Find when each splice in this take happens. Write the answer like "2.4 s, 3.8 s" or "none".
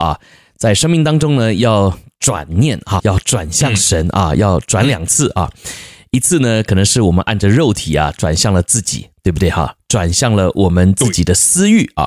3.0 s